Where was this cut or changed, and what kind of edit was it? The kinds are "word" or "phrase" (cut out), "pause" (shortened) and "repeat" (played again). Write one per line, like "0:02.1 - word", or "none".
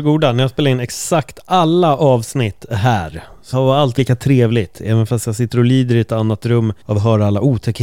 0:03.5 - word
0:04.0 - word
0:06.8 - pause